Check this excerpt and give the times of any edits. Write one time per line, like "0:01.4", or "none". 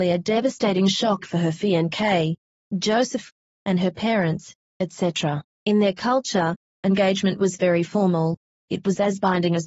none

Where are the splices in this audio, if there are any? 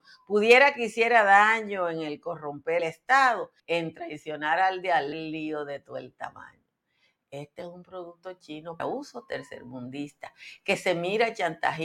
0:02.8
0:03.6
0:05.1
0:08.8

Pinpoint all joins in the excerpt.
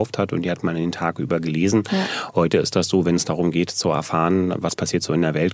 none

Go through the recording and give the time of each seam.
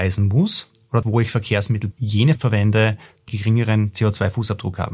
0:01.0
0:01.9
0:02.4
0:03.3

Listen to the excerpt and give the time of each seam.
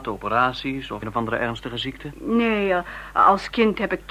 0:01.0

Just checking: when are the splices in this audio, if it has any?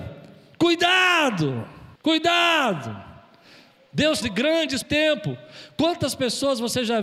0:02.0
0:04.2
0:04.8

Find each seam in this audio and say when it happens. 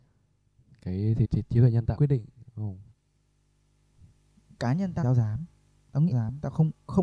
0:01.2
0:02.0
0:05.0
0:06.1

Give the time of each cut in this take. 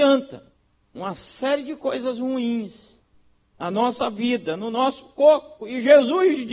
none

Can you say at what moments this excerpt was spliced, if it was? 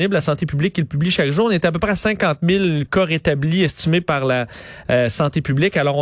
none

